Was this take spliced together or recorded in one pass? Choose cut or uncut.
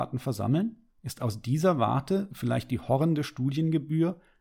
cut